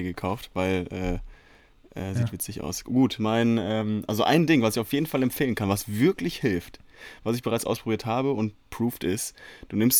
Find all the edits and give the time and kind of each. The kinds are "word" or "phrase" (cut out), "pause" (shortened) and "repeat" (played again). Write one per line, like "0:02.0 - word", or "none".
none

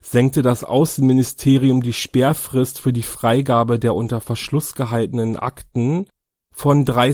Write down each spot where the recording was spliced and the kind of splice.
none

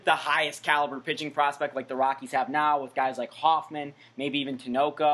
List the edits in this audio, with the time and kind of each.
none

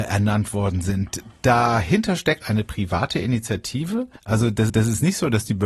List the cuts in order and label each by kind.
0:02.4 - word
0:04.2 - pause
0:04.7 - repeat

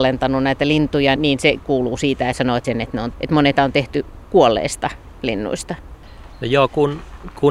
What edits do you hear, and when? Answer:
0:01.2 - word
0:01.6 - phrase
0:02.3 - phrase
0:02.6 - phrase
0:03.1 - word
0:03.6 - word

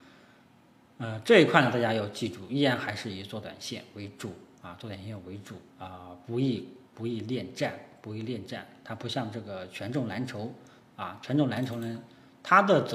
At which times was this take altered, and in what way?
0:04.6 - pause
0:05.7 - pause
0:06.9 - pause

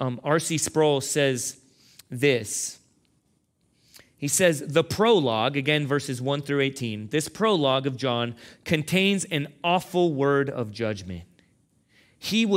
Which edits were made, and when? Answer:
none

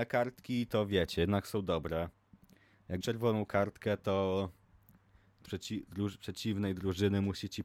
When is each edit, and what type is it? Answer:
0:03.0 - word
0:05.5 - word

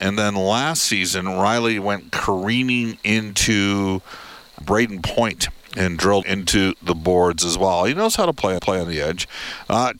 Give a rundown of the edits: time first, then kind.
0:04.6 - word
0:06.2 - word
0:08.6 - repeat

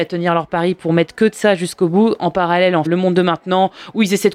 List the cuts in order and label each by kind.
0:02.9 - phrase

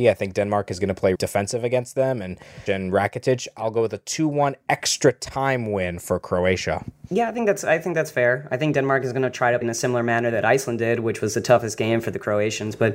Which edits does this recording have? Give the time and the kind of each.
0:01.1 - word
0:02.7 - phrase
0:09.6 - word

